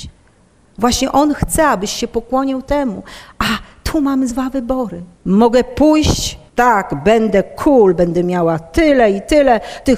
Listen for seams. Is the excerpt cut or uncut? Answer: cut